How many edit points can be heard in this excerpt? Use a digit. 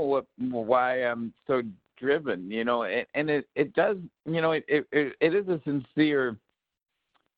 1